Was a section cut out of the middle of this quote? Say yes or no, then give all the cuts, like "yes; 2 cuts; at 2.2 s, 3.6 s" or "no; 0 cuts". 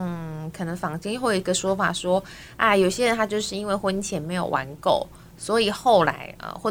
no; 0 cuts